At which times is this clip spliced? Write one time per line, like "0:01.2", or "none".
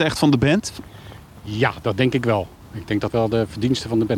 0:03.1